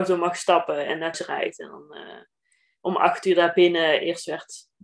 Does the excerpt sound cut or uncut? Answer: cut